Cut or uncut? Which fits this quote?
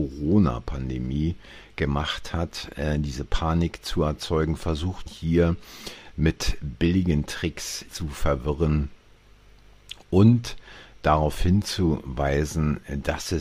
cut